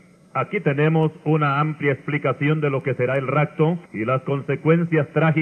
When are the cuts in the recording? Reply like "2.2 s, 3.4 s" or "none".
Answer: 3.9 s